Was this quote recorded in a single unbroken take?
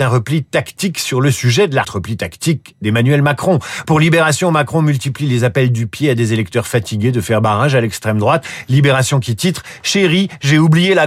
no; 1 cut; at 1.8 s

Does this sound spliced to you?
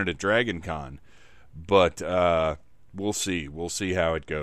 yes; 1 cut; at 2.9 s

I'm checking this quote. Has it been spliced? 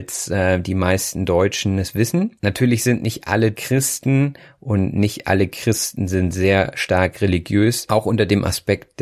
no; 0 cuts

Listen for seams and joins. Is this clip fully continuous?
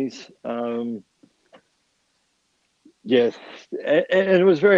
yes; 0 cuts

